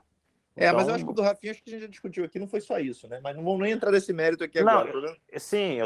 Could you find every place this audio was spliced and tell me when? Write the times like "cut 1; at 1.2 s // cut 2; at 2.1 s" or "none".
cut 1; at 1.1 s